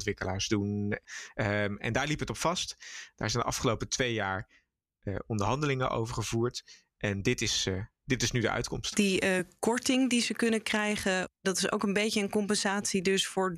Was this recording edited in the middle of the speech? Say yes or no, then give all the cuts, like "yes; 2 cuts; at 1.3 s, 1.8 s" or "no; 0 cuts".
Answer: no; 0 cuts